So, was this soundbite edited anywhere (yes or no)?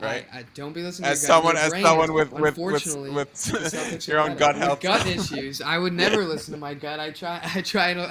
no